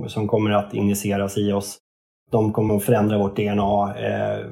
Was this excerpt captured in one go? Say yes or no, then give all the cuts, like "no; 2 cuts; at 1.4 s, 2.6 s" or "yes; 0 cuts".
yes; 0 cuts